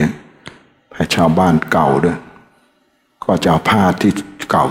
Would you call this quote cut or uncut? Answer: uncut